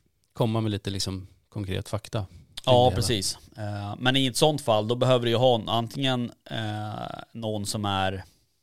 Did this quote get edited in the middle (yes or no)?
no